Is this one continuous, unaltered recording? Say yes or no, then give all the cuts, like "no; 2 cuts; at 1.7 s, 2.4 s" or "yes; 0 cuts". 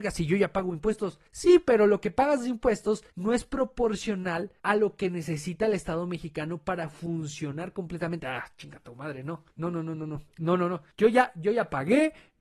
no; 6 cuts; at 1.3 s, 3.1 s, 4.6 s, 9.5 s, 10.3 s, 10.9 s